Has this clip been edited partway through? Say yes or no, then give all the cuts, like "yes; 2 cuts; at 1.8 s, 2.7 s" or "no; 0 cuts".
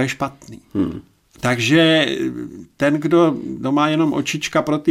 no; 0 cuts